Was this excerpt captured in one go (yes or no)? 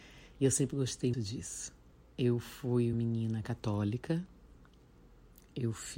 no